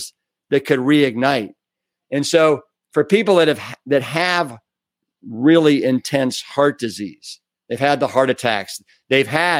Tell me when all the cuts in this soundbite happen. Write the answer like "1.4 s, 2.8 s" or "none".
none